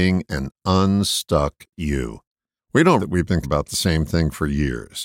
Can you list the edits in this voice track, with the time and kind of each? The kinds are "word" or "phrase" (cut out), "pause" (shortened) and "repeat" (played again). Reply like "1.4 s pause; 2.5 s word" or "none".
2.6 s pause; 3.0 s word; 3.4 s word

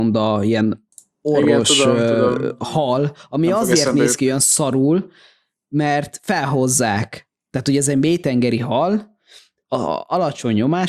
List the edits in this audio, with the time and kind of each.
none

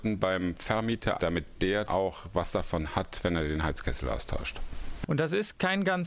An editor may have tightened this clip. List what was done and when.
1.2 s word; 1.9 s word

